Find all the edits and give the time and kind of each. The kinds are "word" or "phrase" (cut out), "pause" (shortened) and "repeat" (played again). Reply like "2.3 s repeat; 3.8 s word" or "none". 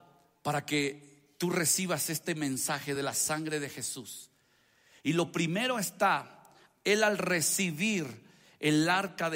none